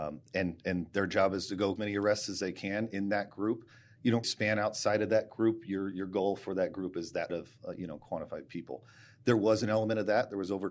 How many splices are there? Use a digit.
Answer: 3